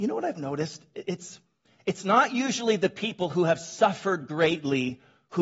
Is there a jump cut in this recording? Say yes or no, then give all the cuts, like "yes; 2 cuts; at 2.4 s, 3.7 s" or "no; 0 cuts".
no; 0 cuts